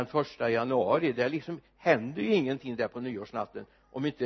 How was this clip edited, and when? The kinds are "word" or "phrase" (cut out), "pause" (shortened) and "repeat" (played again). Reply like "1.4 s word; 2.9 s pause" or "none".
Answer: none